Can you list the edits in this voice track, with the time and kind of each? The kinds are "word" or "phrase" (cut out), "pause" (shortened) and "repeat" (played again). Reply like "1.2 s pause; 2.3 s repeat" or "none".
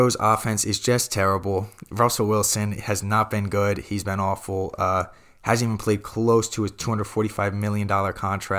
none